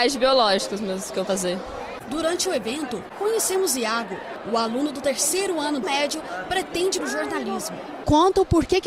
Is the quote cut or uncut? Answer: cut